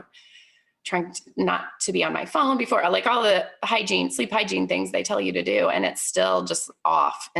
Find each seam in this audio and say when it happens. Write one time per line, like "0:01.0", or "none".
none